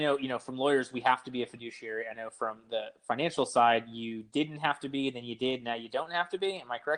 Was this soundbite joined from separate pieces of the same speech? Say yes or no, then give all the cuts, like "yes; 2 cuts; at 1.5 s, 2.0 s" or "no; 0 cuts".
no; 0 cuts